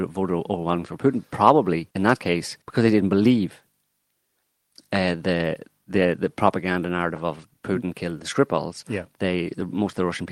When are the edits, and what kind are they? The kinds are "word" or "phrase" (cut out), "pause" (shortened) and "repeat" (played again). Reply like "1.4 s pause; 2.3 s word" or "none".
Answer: 1.9 s pause; 2.6 s pause